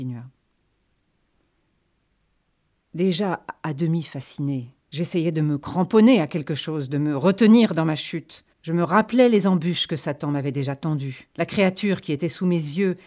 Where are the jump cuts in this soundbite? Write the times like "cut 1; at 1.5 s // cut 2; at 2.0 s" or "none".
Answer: cut 1; at 4.8 s // cut 2; at 8.5 s // cut 3; at 11.3 s

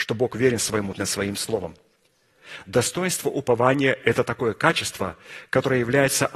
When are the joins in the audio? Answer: cut 1; at 0.9 s

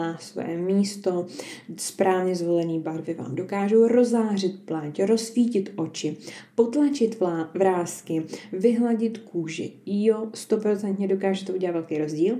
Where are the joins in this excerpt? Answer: none

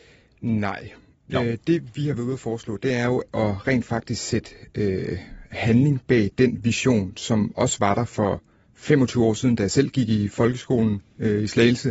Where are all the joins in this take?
none

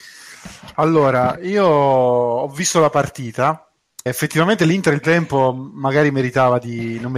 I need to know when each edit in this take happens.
cut 1; at 4.1 s // cut 2; at 5.0 s

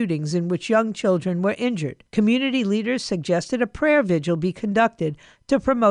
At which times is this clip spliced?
cut 1; at 2.1 s

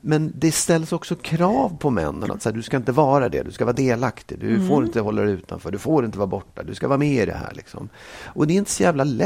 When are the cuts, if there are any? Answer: none

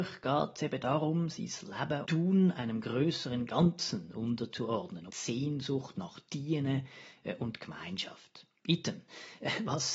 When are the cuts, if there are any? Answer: cut 1; at 2.0 s // cut 2; at 5.1 s

